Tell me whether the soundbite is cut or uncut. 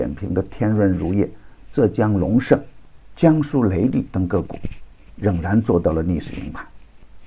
uncut